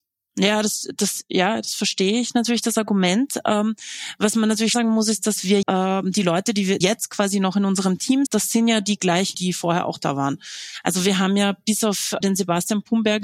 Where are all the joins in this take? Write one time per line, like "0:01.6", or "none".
0:04.7
0:05.6
0:06.8
0:08.3
0:09.3
0:12.2